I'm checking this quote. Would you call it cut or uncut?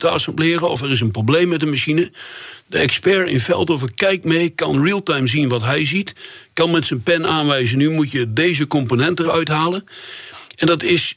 cut